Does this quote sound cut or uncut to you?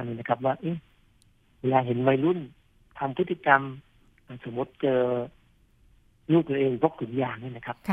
uncut